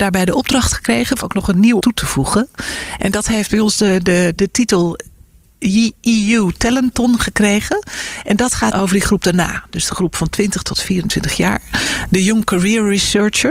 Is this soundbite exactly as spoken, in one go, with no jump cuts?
no; 4 cuts; at 1.2 s, 1.8 s, 4.4 s, 8.7 s

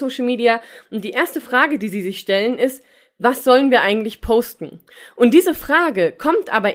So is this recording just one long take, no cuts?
yes; 0 cuts

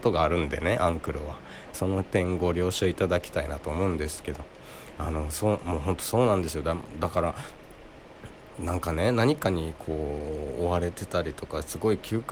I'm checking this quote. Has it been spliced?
yes; 1 cut; at 1.7 s

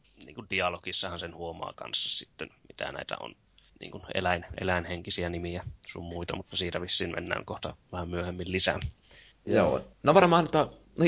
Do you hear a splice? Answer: no; 0 cuts

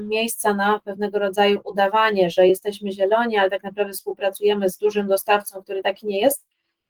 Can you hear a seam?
no; 0 cuts

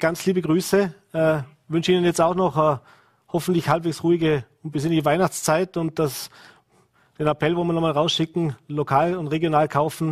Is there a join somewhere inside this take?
no; 0 cuts

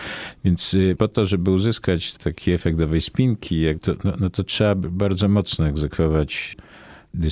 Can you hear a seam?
no; 0 cuts

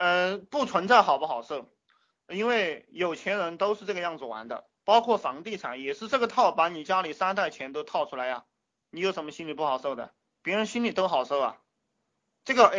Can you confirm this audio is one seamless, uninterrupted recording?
yes; 0 cuts

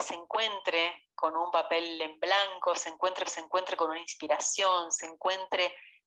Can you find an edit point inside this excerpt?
yes; 1 cut; at 3.3 s

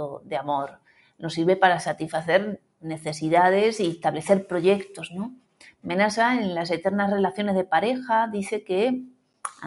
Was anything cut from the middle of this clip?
no; 0 cuts

